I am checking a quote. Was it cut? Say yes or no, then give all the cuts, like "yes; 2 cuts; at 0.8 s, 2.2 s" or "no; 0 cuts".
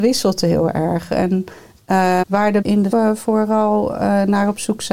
yes; 3 cuts; at 2.2 s, 2.6 s, 2.9 s